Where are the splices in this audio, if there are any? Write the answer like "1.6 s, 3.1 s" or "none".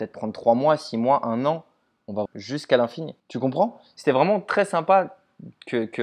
2.3 s, 3.2 s

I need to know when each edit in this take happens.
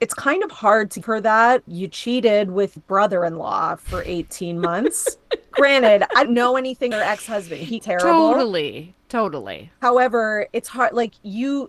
1.0 s, 1.7 s, 2.8 s, 5.5 s, 6.3 s, 6.9 s, 7.8 s

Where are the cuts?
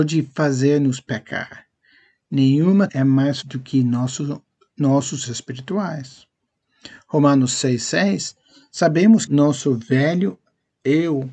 2.9 s, 3.4 s, 5.2 s, 9.3 s

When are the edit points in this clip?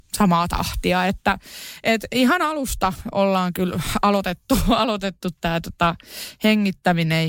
none

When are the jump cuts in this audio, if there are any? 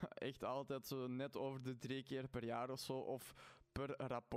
1.8 s

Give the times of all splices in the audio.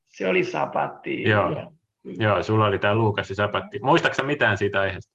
none

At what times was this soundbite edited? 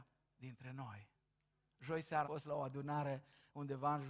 2.2 s

